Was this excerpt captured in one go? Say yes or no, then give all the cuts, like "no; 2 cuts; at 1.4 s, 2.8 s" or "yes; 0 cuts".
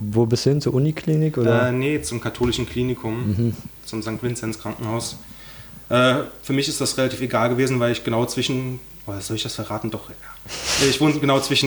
yes; 0 cuts